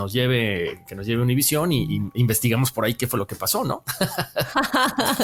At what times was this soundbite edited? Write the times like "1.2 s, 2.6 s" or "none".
none